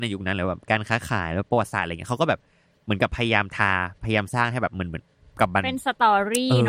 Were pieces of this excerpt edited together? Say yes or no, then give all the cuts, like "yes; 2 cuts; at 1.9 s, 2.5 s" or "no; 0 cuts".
no; 0 cuts